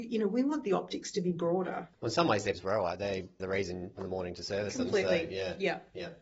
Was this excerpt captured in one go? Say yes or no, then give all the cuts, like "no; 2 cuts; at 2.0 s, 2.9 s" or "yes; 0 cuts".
no; 4 cuts; at 1.9 s, 2.5 s, 3.4 s, 4.0 s